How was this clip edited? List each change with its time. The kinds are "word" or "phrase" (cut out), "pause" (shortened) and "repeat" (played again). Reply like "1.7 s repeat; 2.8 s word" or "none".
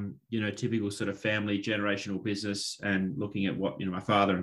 none